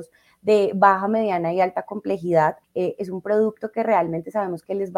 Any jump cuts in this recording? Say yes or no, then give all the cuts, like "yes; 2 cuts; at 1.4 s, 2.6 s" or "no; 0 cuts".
yes; 1 cut; at 2.6 s